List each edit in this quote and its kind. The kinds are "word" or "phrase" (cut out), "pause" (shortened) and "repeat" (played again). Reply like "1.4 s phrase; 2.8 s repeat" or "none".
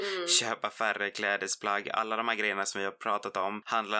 none